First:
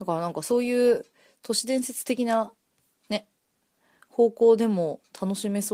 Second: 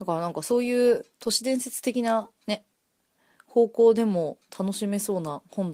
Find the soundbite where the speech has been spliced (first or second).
second